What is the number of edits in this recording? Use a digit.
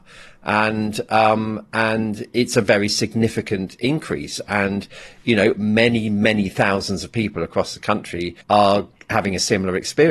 1